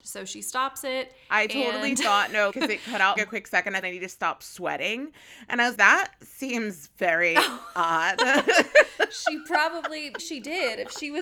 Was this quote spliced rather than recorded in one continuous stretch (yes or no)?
yes